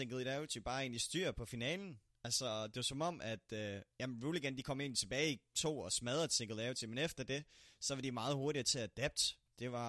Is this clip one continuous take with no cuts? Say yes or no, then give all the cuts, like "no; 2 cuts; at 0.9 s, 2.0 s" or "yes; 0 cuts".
no; 1 cut; at 5.5 s